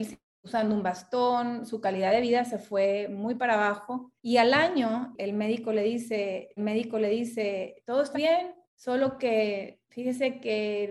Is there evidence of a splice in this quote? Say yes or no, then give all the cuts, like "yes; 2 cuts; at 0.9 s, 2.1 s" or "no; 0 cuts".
yes; 5 cuts; at 4.2 s, 6.6 s, 8.1 s, 8.6 s, 9.9 s